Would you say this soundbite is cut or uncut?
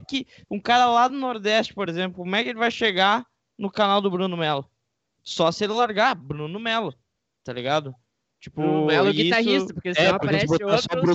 uncut